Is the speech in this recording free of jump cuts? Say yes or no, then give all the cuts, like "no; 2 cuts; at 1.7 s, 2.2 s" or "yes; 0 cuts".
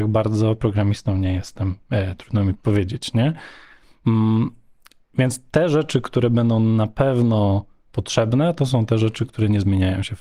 yes; 0 cuts